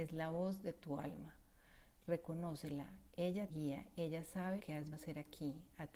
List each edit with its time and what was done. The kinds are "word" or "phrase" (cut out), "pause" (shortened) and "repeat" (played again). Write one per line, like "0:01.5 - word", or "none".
0:03.5 - word
0:04.6 - word
0:04.9 - word

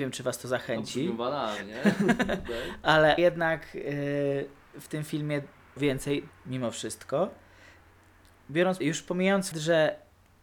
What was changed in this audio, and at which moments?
0:03.2 - word
0:04.7 - word
0:05.8 - word
0:06.3 - word
0:08.8 - word
0:09.5 - word

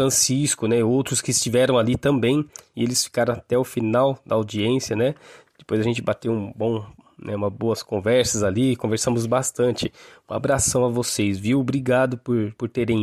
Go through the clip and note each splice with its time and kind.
none

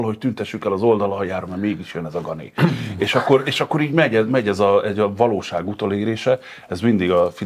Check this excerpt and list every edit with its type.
none

